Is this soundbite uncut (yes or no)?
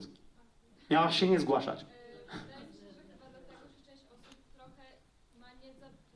yes